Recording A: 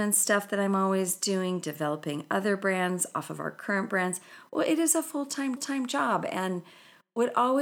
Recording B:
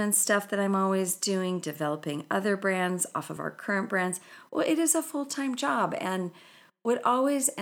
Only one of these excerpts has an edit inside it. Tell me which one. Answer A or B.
A